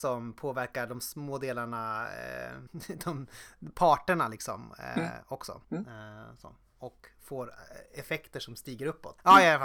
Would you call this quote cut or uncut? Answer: uncut